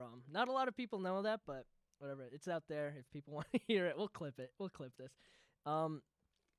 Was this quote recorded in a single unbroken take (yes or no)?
yes